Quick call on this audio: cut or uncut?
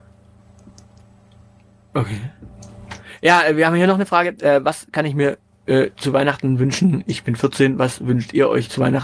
uncut